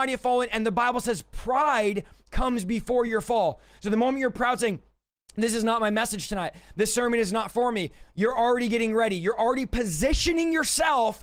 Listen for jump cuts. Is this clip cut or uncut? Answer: uncut